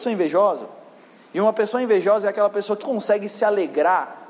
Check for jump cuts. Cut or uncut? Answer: cut